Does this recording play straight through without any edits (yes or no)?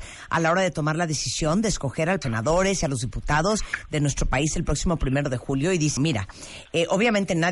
no